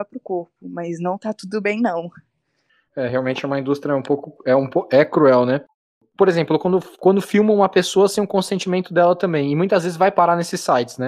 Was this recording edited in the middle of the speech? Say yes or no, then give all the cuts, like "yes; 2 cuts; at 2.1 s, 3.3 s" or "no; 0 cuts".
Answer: no; 0 cuts